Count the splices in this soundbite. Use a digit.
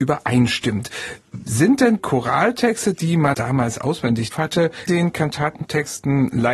4